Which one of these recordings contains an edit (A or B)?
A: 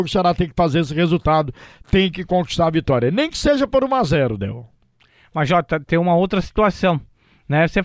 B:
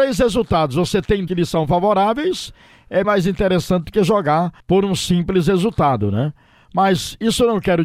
B